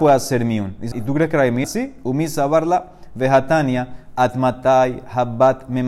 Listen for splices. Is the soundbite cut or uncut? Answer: cut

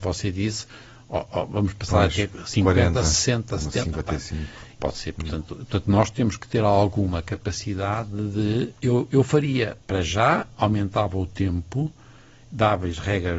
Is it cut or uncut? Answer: cut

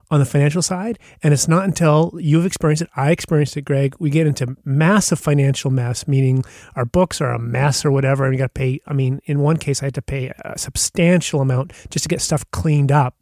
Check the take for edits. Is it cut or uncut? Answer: uncut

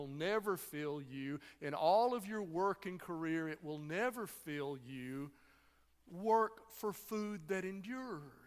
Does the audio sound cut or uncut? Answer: uncut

